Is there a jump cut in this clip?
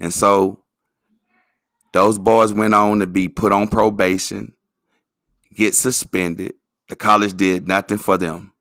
no; 0 cuts

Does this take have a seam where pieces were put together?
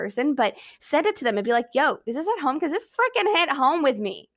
no; 0 cuts

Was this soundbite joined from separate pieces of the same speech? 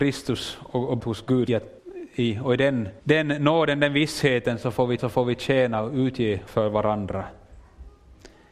yes; 6 cuts; at 1.0 s, 1.5 s, 1.8 s, 3.0 s, 5.0 s, 6.5 s

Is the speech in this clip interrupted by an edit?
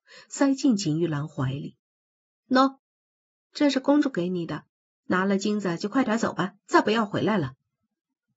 yes; 2 cuts; at 1.8 s, 6.6 s

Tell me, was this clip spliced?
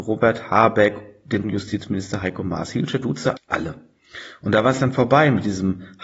yes; 2 cuts; at 1.4 s, 3.4 s

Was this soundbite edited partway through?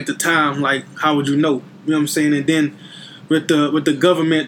no; 0 cuts

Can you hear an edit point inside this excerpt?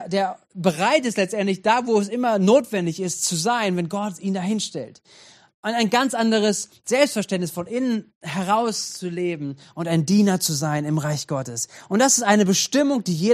no; 0 cuts

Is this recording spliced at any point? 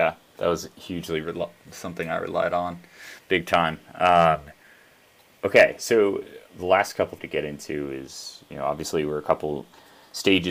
yes; 2 cuts; at 6.5 s, 7.2 s

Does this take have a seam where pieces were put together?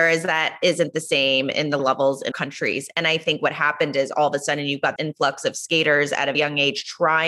yes; 4 cuts; at 1.8 s, 2.3 s, 5.0 s, 6.3 s

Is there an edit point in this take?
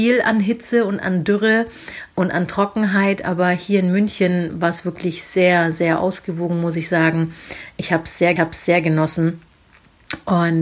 yes; 1 cut; at 8.4 s

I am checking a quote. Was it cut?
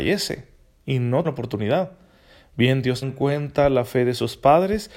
yes; 2 cuts; at 1.2 s, 3.0 s

